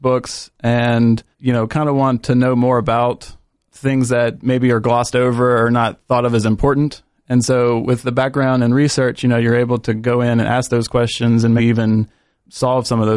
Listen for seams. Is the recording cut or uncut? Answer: cut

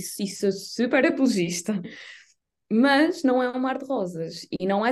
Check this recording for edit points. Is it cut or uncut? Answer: uncut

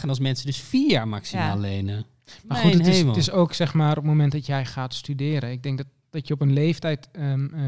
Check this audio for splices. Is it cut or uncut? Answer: uncut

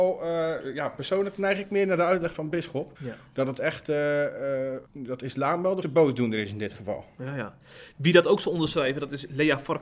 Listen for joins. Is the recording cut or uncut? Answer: cut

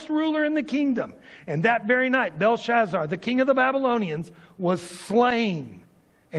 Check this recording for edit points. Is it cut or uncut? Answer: uncut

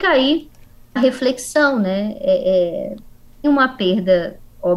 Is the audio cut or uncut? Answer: cut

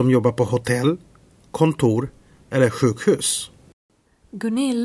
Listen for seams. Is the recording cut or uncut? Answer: uncut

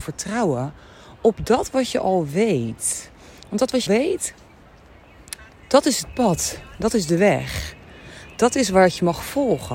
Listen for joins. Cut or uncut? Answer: cut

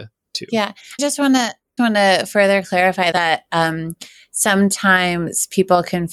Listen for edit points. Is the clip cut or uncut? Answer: cut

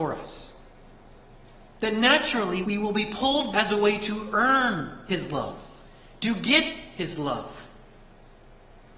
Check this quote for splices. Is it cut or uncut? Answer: cut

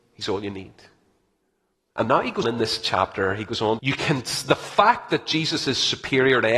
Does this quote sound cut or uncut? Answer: cut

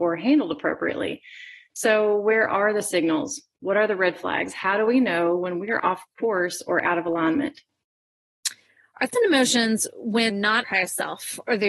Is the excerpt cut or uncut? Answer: cut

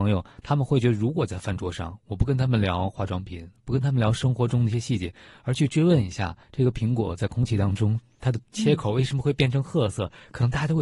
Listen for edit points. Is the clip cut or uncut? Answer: cut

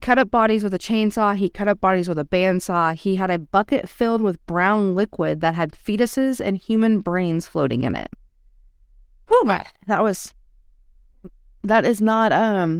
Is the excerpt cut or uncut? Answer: uncut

